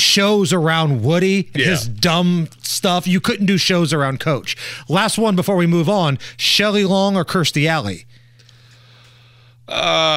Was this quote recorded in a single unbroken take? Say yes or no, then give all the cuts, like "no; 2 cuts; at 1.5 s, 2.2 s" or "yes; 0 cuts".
no; 1 cut; at 1.6 s